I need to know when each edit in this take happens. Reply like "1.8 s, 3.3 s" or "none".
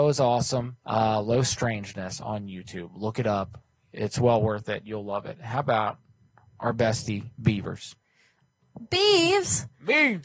7.3 s